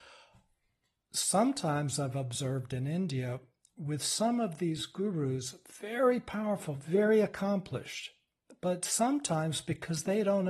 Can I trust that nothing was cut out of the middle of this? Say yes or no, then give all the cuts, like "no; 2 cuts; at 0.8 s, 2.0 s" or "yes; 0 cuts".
yes; 0 cuts